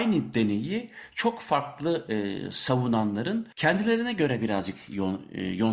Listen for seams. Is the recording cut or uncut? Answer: cut